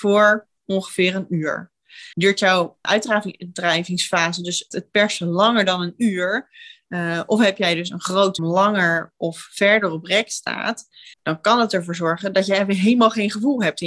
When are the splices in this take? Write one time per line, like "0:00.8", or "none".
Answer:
0:02.1
0:02.8
0:04.7
0:08.4
0:11.1